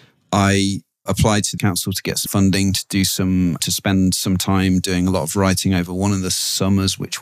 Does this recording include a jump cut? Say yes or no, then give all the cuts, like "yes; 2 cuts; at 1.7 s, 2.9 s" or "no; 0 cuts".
yes; 4 cuts; at 1.1 s, 1.6 s, 2.3 s, 3.6 s